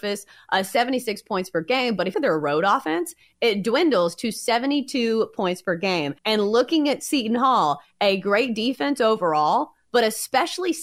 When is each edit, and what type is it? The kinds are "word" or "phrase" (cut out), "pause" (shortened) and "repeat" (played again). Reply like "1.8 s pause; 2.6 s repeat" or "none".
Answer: 2.1 s phrase; 6.2 s pause

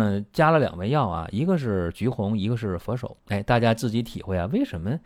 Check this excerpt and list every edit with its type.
3.2 s pause

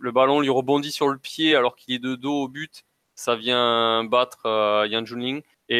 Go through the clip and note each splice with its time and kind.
none

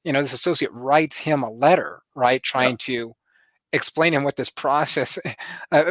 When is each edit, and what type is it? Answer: none

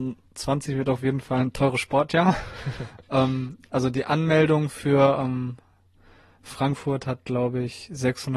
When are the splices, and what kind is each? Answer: none

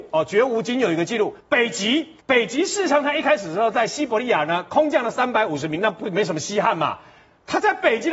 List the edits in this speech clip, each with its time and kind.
1.4 s pause; 2.2 s pause

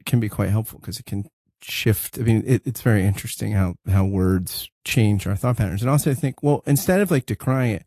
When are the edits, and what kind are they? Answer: none

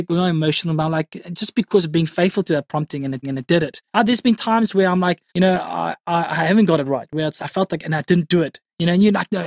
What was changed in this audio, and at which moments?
3.2 s repeat; 3.9 s pause; 5.3 s pause; 7.4 s word

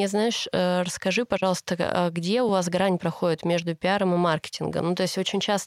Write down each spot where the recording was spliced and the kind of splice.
none

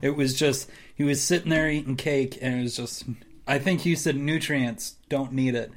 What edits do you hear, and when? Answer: none

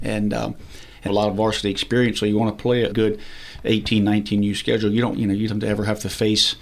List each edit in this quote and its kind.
1.1 s phrase; 2.9 s word; 5.1 s word; 5.5 s phrase

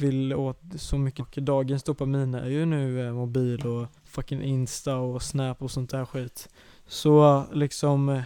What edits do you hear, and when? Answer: 1.2 s word; 4.0 s pause

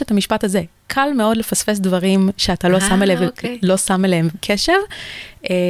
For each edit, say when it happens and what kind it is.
none

